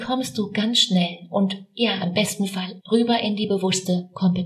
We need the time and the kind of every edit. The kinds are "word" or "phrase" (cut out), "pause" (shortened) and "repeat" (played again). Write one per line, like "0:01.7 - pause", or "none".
0:02.8 - word